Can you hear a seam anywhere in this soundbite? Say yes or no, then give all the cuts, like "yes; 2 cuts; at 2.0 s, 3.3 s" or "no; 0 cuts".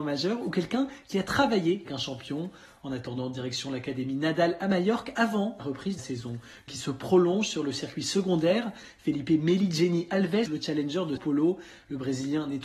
yes; 6 cuts; at 1.9 s, 5.6 s, 6.0 s, 6.7 s, 10.5 s, 11.2 s